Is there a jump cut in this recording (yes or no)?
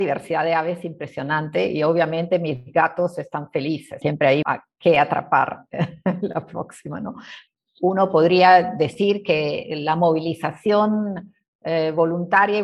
yes